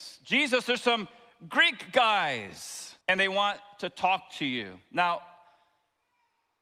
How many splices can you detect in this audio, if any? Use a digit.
1